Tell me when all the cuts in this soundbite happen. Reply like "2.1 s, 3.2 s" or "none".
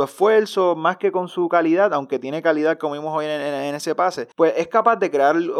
4.3 s